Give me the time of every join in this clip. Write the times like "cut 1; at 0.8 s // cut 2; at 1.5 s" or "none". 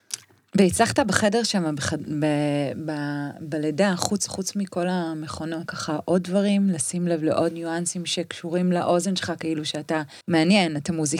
cut 1; at 4.3 s // cut 2; at 5.7 s // cut 3; at 7.5 s // cut 4; at 10.2 s